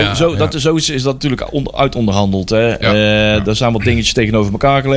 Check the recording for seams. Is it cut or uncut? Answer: uncut